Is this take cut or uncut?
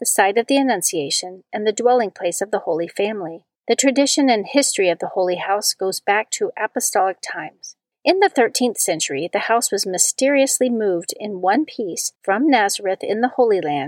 cut